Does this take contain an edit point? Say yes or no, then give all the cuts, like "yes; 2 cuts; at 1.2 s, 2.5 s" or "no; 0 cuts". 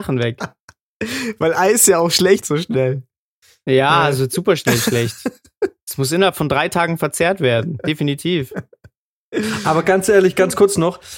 yes; 1 cut; at 2.4 s